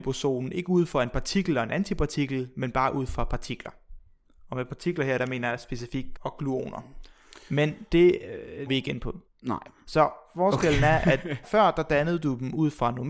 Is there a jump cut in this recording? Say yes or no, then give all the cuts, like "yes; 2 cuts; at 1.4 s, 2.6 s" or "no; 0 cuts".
yes; 4 cuts; at 6.2 s, 8.7 s, 9.3 s, 11.4 s